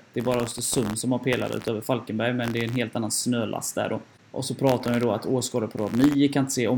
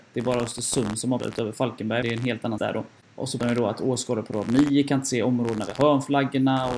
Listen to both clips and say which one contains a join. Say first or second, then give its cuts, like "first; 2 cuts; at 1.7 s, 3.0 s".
second; 4 cuts; at 1.2 s, 2.0 s, 2.6 s, 3.4 s